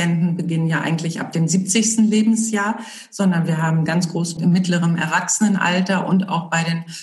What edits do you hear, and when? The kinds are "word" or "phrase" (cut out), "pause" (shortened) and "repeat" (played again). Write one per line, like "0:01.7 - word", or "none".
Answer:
0:03.9 - word
0:04.4 - word